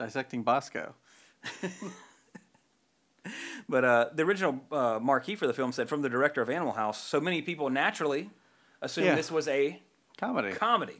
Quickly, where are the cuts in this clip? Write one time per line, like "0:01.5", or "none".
none